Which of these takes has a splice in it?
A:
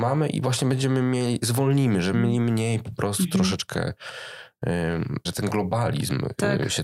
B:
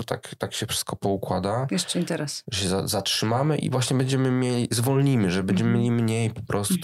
A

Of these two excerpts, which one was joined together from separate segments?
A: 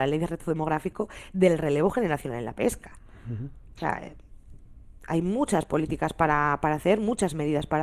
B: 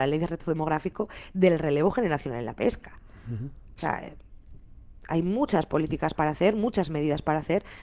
B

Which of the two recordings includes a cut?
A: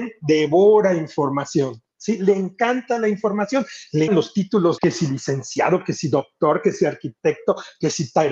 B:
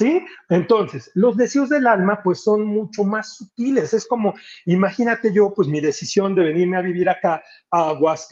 A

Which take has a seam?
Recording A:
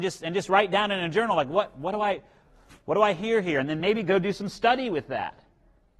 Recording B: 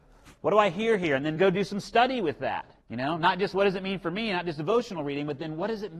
B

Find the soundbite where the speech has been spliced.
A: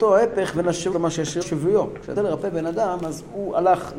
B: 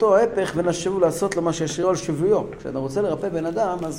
A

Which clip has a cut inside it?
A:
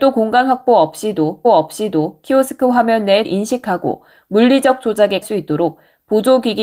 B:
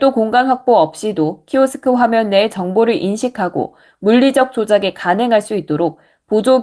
A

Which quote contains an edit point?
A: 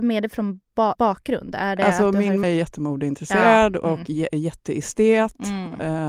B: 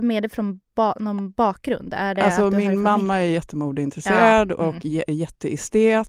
A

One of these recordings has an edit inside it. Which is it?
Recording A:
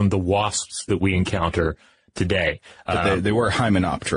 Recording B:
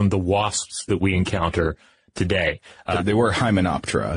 B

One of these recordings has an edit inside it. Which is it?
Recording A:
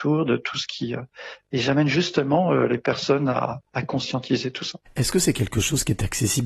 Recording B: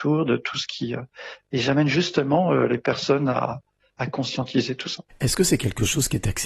A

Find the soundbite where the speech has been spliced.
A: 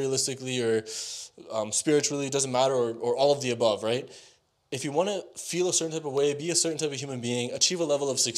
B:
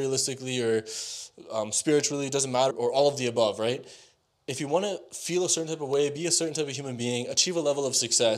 B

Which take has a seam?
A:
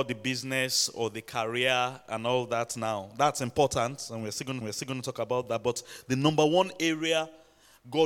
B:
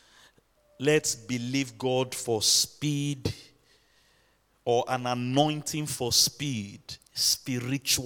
A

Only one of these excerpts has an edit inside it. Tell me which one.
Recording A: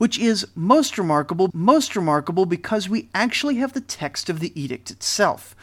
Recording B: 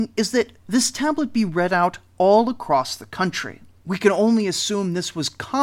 A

